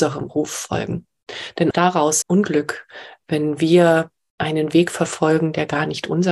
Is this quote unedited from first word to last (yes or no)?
no